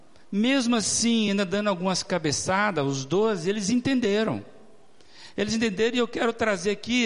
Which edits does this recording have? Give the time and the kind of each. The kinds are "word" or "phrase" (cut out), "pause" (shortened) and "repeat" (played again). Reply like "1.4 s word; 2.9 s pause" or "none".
none

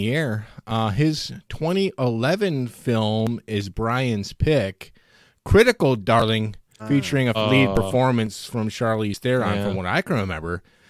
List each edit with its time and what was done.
6.8 s word; 7.3 s word

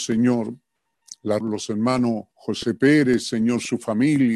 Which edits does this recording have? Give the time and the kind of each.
1.4 s phrase; 2.3 s pause

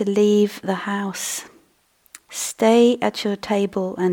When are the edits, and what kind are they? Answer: 2.2 s pause

